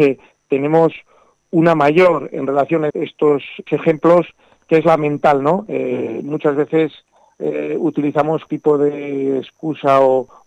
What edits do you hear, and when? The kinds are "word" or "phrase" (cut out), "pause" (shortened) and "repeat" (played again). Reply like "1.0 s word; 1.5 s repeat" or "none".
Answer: 2.9 s word; 3.7 s word; 8.5 s word